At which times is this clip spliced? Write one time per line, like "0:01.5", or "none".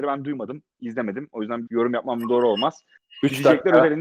0:01.7

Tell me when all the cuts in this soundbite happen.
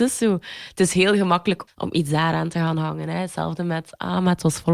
0:01.7

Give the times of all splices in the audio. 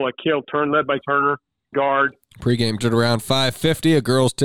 0:01.0
0:01.7
0:02.8

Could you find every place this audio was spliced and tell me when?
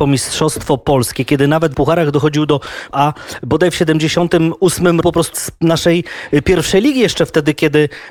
0:01.7
0:02.9
0:05.0
0:05.3

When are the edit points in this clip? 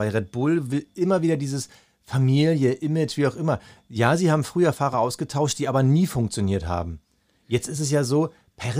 none

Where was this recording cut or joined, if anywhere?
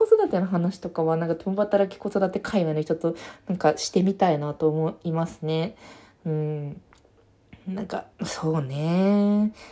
0:08.1

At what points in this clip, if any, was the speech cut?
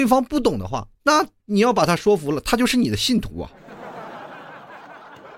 0:00.9

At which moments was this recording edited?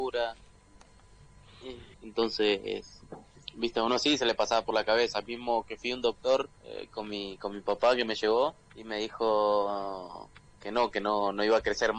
0:01.9
0:06.6
0:08.6

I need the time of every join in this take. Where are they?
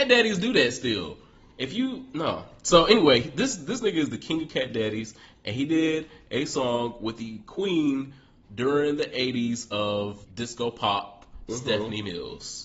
0:10.2

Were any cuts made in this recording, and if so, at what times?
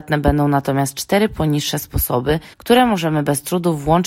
0:02.5

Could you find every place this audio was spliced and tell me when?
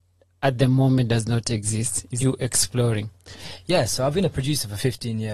0:02.2

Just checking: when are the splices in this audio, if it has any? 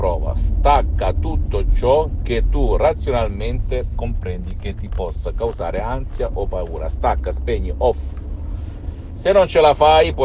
none

